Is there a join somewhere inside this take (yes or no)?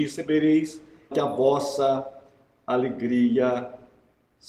yes